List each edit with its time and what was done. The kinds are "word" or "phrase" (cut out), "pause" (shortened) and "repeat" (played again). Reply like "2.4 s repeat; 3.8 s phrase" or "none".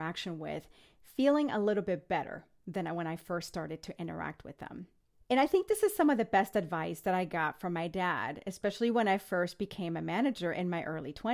5.1 s pause